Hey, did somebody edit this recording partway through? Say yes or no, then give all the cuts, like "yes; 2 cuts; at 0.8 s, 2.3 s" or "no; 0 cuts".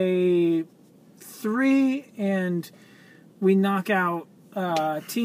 no; 0 cuts